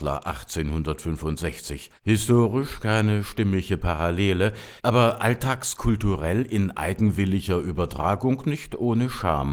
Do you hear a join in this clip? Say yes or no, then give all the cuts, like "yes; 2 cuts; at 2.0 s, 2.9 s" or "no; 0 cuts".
yes; 2 cuts; at 2.0 s, 4.8 s